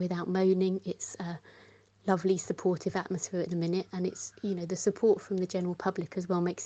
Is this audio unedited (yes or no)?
yes